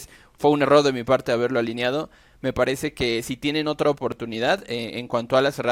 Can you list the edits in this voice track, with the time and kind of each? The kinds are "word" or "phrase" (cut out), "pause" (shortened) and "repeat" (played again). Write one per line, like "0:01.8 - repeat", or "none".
none